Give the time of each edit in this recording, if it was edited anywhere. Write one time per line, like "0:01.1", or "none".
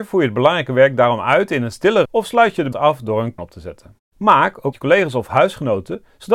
0:02.1
0:02.7
0:03.4
0:04.1
0:04.7